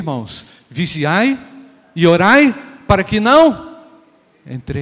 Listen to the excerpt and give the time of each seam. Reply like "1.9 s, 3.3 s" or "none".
none